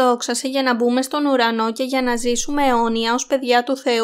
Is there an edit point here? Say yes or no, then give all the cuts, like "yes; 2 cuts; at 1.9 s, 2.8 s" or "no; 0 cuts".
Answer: no; 0 cuts